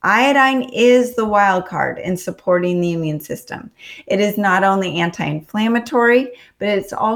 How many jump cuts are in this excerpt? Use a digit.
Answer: 0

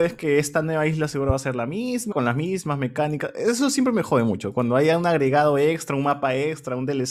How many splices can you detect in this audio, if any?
1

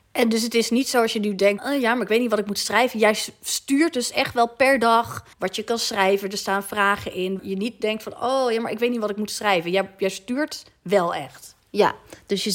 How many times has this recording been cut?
3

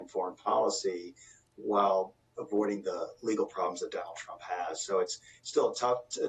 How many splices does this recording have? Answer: 0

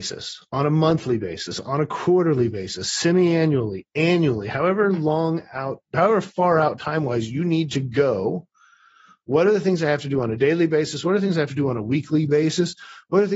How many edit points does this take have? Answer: 0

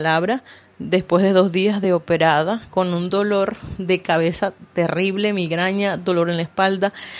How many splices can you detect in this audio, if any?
0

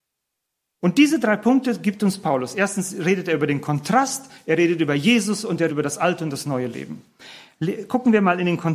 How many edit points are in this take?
1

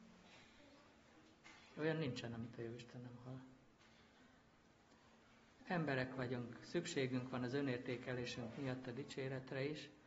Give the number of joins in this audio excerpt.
0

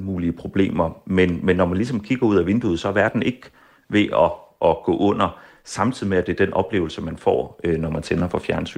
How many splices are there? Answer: 0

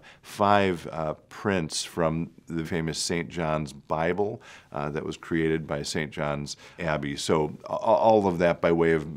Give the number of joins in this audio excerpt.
2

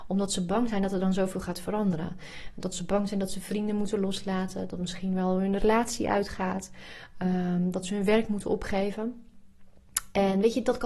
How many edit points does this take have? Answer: 0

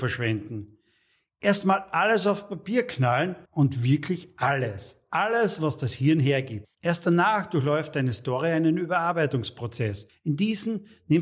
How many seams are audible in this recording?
2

